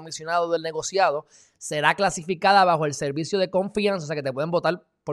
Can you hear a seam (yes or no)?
no